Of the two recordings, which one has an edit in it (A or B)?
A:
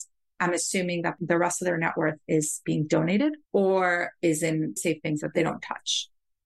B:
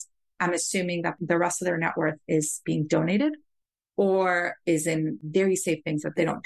A